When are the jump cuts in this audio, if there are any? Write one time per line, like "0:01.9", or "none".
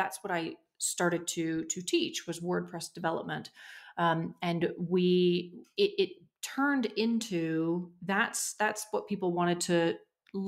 none

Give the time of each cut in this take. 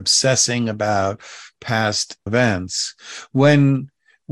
0:02.3

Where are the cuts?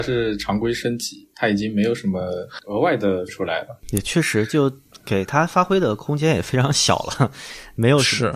0:03.3
0:03.8

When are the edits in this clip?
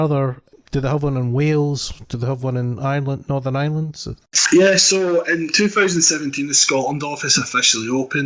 none

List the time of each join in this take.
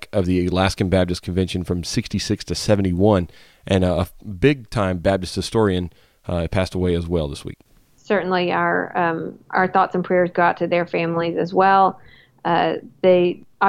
none

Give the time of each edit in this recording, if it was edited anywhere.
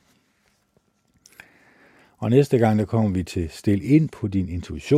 none

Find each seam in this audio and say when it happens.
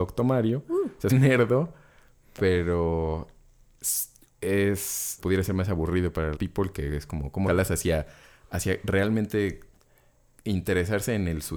0:01.1
0:05.2
0:06.3
0:07.5

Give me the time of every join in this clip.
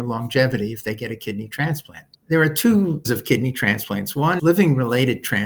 0:02.1
0:03.0
0:04.4

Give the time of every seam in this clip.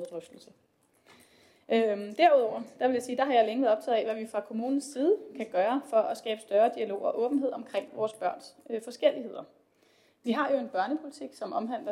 none

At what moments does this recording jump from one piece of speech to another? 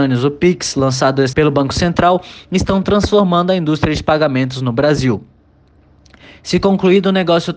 0:01.3

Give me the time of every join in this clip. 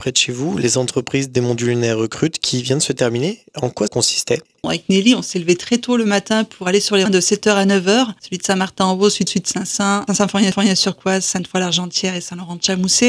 0:03.9
0:07.1
0:09.3
0:10.1
0:10.5

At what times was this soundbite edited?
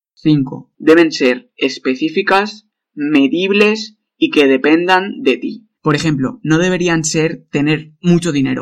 0:05.7

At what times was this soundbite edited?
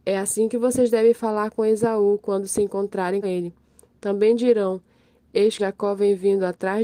0:03.2
0:05.6

